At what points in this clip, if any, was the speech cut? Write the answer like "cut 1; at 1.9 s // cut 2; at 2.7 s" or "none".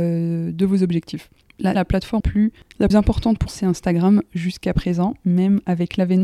cut 1; at 1.8 s // cut 2; at 2.2 s // cut 3; at 2.9 s // cut 4; at 3.5 s